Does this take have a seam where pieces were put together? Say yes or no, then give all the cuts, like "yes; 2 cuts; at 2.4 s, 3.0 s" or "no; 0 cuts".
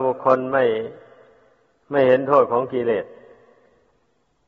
no; 0 cuts